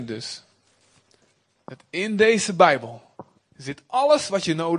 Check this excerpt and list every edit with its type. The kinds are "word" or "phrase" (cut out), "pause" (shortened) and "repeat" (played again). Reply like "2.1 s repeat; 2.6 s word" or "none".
none